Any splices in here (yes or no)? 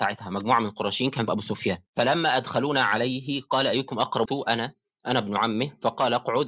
yes